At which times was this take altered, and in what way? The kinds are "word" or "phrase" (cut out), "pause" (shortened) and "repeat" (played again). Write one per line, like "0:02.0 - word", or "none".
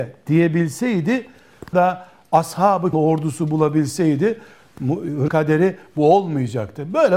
0:01.7 - phrase
0:02.9 - phrase
0:05.3 - word